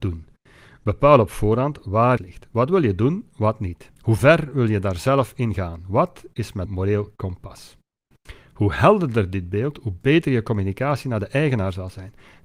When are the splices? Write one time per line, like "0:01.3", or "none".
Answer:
0:02.2
0:04.0
0:06.7